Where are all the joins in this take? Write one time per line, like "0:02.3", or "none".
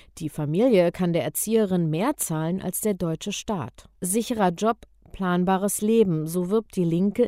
0:04.0